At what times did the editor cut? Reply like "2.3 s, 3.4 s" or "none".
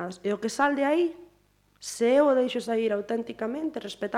none